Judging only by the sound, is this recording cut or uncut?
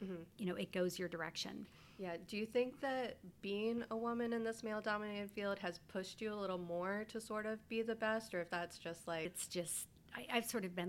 uncut